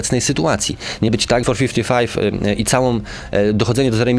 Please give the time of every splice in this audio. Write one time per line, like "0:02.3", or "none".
0:01.1
0:01.4